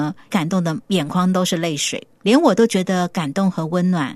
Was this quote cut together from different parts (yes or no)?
yes